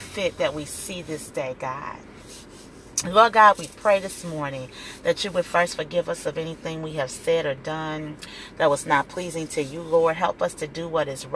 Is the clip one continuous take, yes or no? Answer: yes